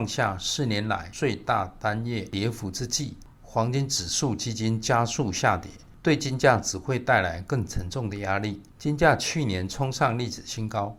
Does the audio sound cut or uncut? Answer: uncut